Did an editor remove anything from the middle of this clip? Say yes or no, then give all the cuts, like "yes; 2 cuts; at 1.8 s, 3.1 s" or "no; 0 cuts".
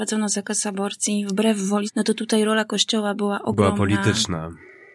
yes; 1 cut; at 1.9 s